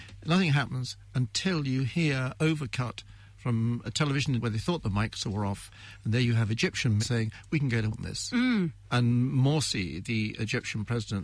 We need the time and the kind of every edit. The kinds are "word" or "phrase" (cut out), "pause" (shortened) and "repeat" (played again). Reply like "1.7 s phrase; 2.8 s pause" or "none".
2.4 s word; 3.8 s word; 4.4 s word; 7.0 s word; 7.9 s word; 8.8 s pause